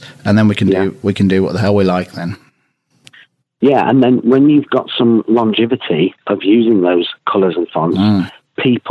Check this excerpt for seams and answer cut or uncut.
uncut